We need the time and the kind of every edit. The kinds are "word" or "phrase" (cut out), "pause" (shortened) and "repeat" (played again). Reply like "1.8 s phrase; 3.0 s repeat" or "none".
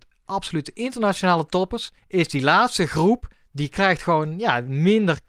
2.0 s pause; 3.3 s pause